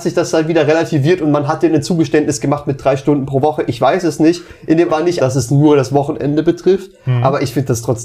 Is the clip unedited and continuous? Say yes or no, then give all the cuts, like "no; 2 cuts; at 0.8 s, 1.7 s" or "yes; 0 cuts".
no; 3 cuts; at 4.6 s, 4.9 s, 5.2 s